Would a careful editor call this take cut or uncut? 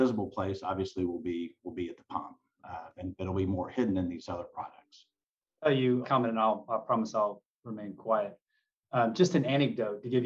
cut